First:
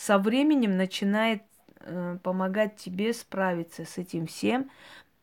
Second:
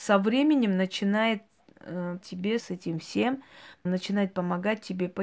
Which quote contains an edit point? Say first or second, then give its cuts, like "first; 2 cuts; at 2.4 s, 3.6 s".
second; 3 cuts; at 2.2 s, 2.6 s, 3.9 s